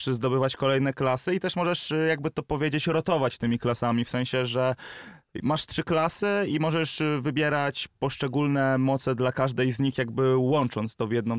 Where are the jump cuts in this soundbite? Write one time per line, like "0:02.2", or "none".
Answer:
none